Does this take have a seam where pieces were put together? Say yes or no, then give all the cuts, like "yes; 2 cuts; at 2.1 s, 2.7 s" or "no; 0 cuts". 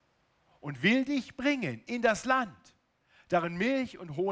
no; 0 cuts